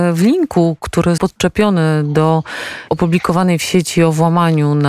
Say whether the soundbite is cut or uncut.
cut